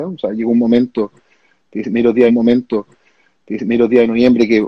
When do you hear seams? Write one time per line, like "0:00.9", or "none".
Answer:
0:02.3